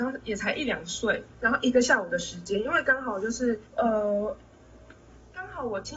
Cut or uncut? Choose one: cut